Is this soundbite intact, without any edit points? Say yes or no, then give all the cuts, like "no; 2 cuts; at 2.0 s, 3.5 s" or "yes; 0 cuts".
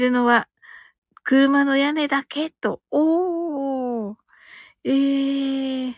yes; 0 cuts